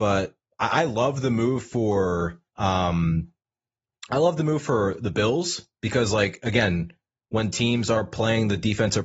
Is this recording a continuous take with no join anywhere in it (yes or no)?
no